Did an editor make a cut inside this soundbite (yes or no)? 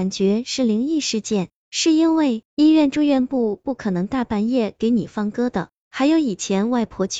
yes